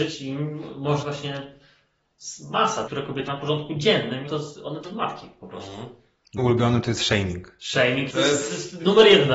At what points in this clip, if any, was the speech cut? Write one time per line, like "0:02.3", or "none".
0:01.0
0:02.9
0:03.3
0:04.3
0:04.8
0:06.4
0:08.1